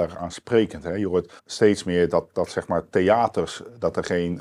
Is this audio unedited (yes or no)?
no